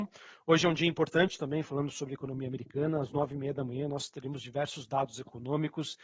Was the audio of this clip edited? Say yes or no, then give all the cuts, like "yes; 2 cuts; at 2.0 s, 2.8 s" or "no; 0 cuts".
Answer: no; 0 cuts